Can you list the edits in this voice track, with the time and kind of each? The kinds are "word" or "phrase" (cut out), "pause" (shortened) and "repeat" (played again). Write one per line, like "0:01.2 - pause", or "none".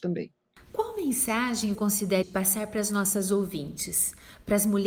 0:01.7 - word
0:02.2 - word